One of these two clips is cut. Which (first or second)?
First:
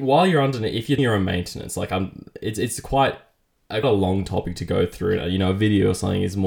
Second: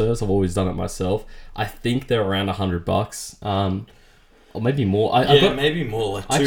first